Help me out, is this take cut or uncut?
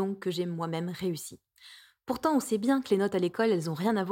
uncut